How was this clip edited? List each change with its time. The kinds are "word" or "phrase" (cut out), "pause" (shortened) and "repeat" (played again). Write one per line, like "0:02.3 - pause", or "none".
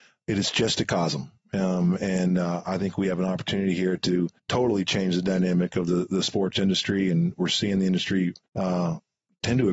0:04.4 - pause
0:08.5 - pause